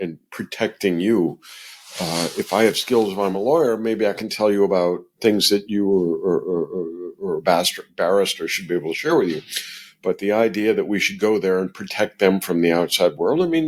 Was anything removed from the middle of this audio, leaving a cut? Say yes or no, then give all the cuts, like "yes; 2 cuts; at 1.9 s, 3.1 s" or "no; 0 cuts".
no; 0 cuts